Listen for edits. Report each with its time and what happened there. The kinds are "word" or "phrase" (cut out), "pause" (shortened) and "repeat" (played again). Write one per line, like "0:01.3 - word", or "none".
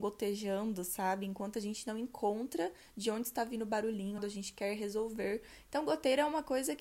0:04.2 - phrase

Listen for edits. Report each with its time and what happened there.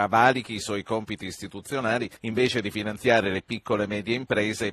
0:02.2 - pause

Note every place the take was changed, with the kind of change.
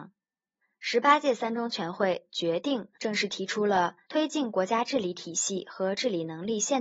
0:02.9 - pause
0:04.0 - pause

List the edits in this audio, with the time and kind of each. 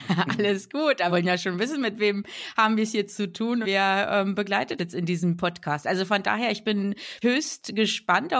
0:01.1 - word
0:03.6 - word
0:04.8 - word
0:07.2 - word

